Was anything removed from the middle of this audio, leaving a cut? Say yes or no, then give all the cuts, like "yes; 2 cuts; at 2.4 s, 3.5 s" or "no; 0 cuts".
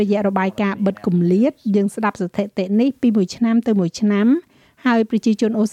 no; 0 cuts